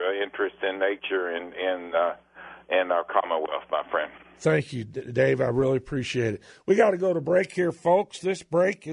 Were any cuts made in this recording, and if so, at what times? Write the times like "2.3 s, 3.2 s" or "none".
none